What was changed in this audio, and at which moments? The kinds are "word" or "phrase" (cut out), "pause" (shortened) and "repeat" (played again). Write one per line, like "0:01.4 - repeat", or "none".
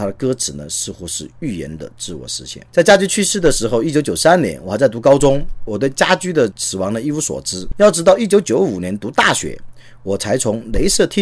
0:02.7 - pause